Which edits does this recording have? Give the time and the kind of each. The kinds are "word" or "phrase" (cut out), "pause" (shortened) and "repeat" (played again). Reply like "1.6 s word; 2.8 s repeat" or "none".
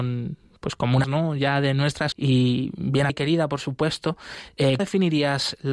1.0 s word; 2.1 s word; 3.1 s word; 4.8 s word